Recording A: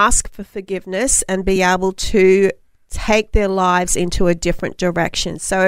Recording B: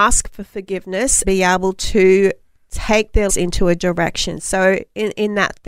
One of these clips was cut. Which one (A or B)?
B